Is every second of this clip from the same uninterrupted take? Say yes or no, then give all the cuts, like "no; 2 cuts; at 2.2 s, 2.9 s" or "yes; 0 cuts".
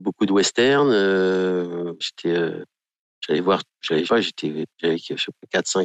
no; 4 cuts; at 2.0 s, 3.7 s, 4.1 s, 4.7 s